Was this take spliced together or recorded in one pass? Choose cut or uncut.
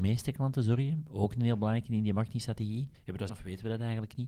cut